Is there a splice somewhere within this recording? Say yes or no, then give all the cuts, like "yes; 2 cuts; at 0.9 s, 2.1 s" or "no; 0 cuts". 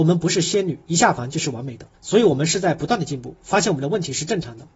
yes; 1 cut; at 1.9 s